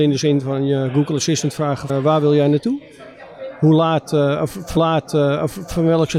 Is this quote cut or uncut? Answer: cut